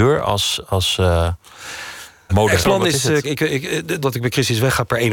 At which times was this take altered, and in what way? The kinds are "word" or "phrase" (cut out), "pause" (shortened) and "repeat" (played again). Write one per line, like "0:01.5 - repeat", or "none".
0:02.3 - word
0:02.6 - word
0:03.2 - word
0:04.0 - word

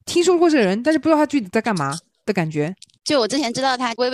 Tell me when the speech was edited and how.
none

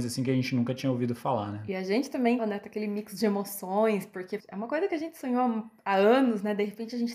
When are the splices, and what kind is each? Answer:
0:02.4 - word
0:04.4 - word

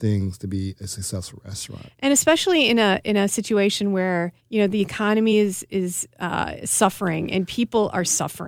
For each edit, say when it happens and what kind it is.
none

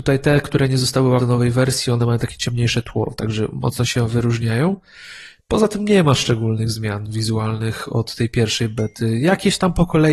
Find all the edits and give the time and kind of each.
0:01.2 - word

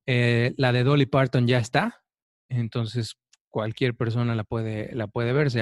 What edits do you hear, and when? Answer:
none

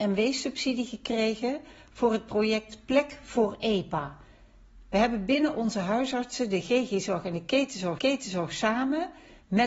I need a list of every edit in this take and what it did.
0:08.0 - repeat

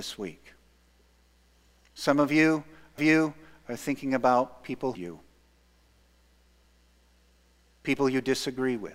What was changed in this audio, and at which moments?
0:03.0 - repeat
0:04.9 - phrase

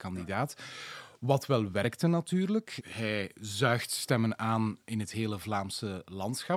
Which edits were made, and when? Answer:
0:02.8 - word

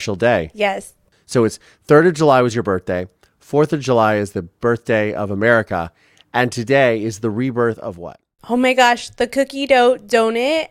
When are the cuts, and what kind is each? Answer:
none

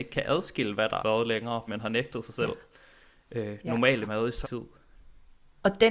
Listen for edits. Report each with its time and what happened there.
0:01.0 - word
0:01.7 - word
0:04.1 - word
0:04.4 - word

